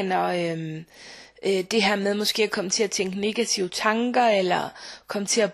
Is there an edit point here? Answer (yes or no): no